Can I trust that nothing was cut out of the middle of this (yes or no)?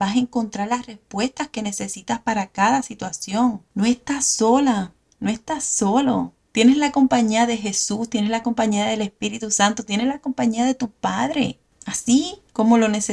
yes